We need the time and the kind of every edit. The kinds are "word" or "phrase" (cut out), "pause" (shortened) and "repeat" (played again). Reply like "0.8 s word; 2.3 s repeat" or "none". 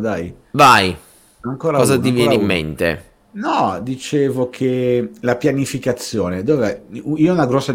none